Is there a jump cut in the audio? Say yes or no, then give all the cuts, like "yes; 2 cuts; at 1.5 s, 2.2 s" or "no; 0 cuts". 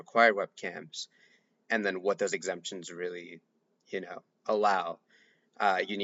no; 0 cuts